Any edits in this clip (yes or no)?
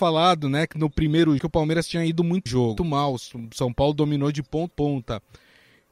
yes